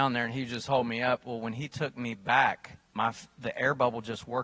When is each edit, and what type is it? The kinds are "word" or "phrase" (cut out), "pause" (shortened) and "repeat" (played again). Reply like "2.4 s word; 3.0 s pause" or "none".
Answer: 2.8 s pause